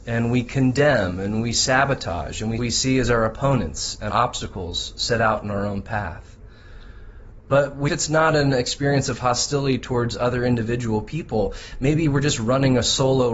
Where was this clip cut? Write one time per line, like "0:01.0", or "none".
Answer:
0:02.6
0:04.1
0:07.9